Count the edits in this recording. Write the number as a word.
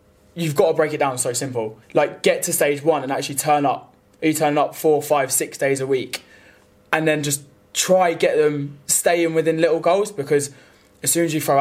one